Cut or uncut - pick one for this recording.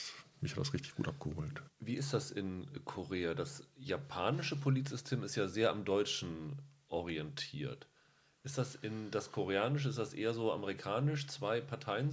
uncut